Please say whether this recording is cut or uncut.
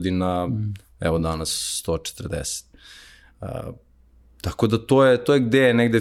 uncut